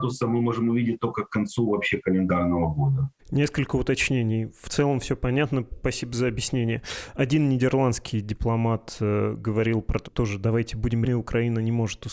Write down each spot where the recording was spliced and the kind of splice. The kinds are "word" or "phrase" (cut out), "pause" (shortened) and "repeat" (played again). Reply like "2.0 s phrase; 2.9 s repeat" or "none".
3.2 s pause; 10.0 s word; 11.0 s word